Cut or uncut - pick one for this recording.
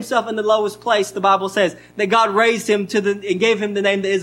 uncut